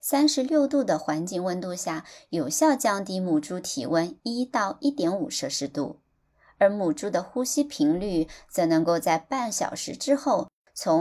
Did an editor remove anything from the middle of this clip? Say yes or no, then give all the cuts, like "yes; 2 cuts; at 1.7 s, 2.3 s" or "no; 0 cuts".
no; 0 cuts